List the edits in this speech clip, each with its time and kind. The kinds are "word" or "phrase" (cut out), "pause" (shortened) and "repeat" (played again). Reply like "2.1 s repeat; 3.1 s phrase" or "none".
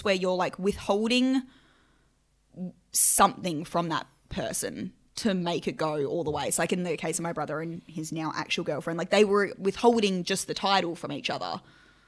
none